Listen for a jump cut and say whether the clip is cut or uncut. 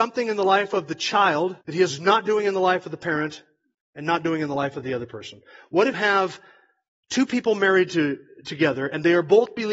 cut